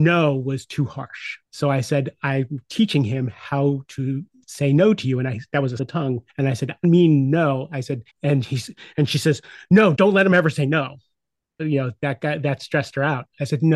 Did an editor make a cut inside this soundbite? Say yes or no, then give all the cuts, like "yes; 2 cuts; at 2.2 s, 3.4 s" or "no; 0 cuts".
yes; 8 cuts; at 1.5 s, 4.4 s, 5.8 s, 6.3 s, 6.8 s, 8.1 s, 9.9 s, 11.6 s